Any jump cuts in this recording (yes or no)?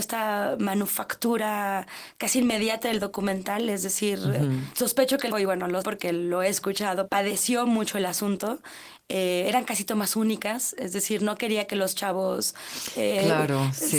yes